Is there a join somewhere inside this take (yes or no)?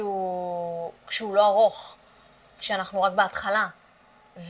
no